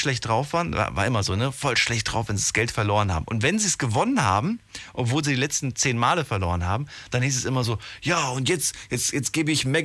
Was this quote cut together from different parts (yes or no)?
no